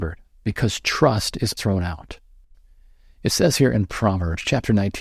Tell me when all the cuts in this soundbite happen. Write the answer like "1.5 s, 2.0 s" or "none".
1.6 s